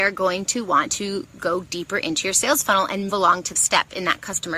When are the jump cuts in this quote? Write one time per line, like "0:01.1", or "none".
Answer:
0:03.1
0:03.6